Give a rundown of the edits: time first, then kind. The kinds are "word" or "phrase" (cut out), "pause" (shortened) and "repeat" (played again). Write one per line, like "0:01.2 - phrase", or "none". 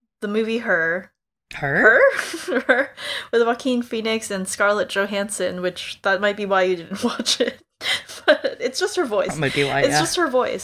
0:01.4 - pause